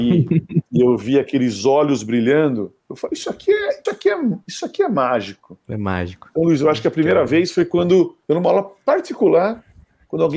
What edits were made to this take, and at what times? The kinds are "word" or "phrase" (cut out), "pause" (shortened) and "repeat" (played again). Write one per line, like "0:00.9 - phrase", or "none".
0:02.8 - pause
0:03.9 - word
0:08.2 - pause

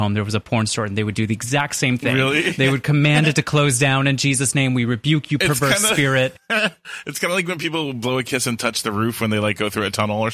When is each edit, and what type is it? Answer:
none

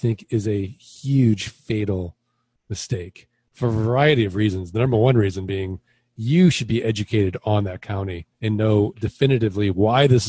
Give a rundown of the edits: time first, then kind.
0:08.3 - pause

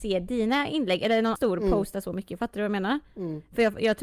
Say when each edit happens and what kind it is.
0:01.4 - word

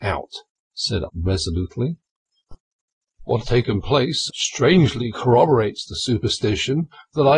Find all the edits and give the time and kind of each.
0:01.1 - word
0:03.4 - word
0:04.3 - word

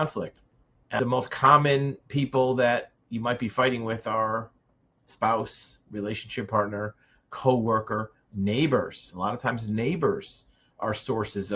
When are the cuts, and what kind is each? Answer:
none

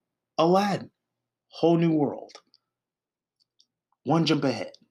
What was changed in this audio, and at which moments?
none

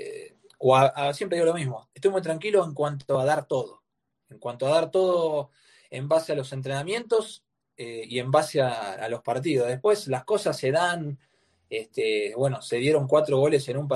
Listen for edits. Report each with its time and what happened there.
none

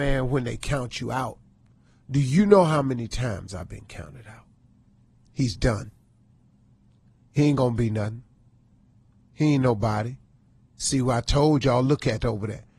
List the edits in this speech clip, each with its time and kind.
none

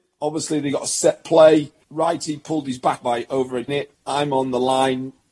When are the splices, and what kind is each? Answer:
0:03.0 - word
0:03.7 - word

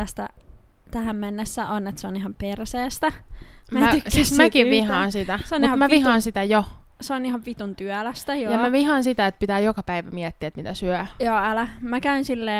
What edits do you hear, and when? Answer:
none

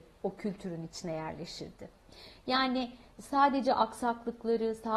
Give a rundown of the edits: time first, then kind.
none

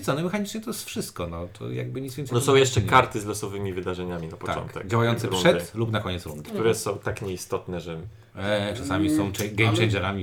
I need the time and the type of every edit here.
none

